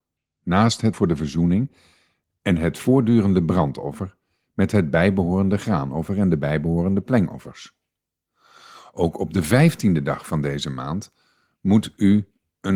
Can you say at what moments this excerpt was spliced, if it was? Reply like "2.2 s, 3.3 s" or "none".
0.9 s